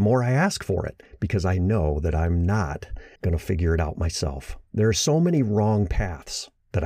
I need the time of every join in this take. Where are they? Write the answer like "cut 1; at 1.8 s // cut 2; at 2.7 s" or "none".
cut 1; at 1.6 s // cut 2; at 3.2 s // cut 3; at 4.7 s